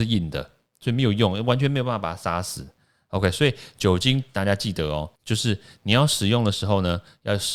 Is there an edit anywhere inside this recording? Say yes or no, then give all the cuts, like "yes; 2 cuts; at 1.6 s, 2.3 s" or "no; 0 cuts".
yes; 1 cut; at 5.2 s